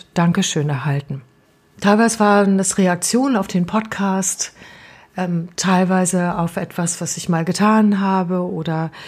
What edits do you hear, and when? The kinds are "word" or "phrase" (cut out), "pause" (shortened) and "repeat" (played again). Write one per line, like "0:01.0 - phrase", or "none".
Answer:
0:01.4 - pause